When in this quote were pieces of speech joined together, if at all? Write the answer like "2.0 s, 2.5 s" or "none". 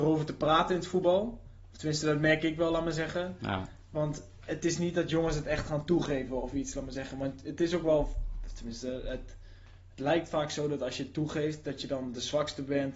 none